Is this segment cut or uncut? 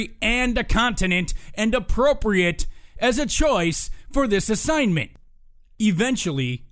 uncut